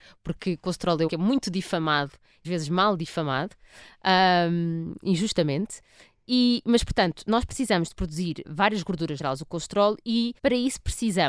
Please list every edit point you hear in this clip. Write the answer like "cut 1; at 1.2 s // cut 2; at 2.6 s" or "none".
cut 1; at 1.1 s // cut 2; at 2.4 s // cut 3; at 8.4 s // cut 4; at 9.2 s // cut 5; at 10.4 s